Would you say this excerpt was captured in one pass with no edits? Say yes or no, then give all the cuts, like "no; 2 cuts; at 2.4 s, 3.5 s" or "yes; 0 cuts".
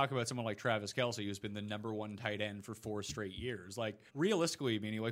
no; 1 cut; at 4.1 s